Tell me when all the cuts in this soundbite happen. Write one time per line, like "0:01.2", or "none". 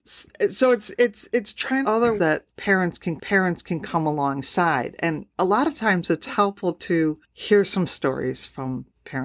0:01.8
0:02.2
0:03.2
0:07.9